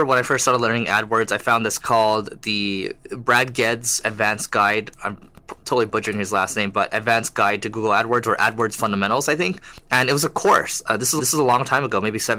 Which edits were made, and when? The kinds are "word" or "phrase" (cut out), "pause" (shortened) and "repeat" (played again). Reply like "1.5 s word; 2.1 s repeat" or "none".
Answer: 1.8 s word; 11.2 s repeat